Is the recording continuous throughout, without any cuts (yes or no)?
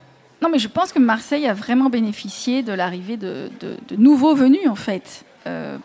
yes